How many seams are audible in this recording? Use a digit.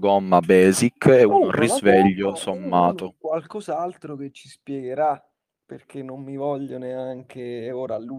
0